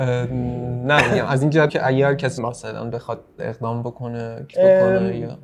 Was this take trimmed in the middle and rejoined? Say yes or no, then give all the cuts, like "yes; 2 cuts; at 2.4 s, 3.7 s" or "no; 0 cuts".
yes; 4 cuts; at 1.7 s, 2.4 s, 3.4 s, 4.5 s